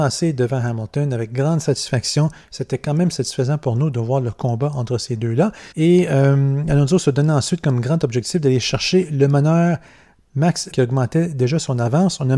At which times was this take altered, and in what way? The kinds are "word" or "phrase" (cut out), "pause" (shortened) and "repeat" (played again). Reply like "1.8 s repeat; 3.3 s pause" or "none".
5.7 s pause; 10.7 s word

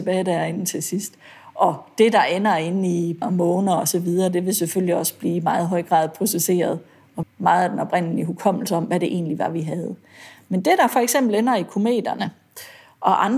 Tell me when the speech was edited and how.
3.2 s word; 7.2 s phrase

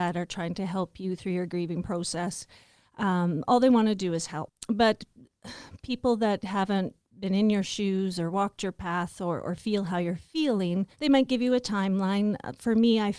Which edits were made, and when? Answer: 10.9 s pause

